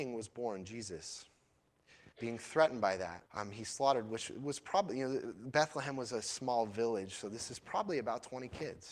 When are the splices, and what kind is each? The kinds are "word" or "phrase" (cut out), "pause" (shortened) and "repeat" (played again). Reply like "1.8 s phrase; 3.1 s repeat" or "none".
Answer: 2.1 s pause; 3.3 s pause